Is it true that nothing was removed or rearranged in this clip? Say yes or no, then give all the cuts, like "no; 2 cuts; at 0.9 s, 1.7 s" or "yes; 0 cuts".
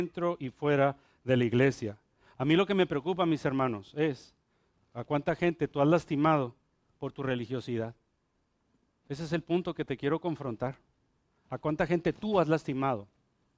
yes; 0 cuts